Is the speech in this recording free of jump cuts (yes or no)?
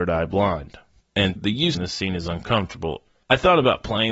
no